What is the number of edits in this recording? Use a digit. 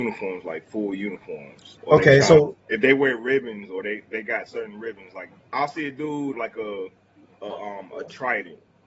3